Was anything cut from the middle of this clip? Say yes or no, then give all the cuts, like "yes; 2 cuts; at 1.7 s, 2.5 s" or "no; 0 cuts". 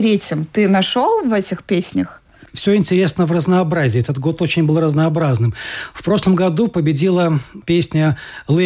no; 0 cuts